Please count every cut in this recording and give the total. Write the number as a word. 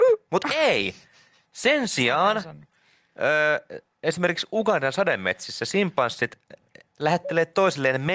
zero